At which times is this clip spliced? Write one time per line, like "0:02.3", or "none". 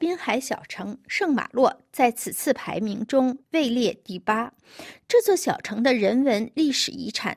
none